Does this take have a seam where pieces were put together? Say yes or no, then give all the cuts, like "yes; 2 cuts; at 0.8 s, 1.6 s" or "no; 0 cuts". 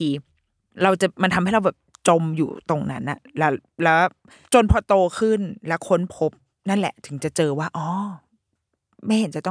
no; 0 cuts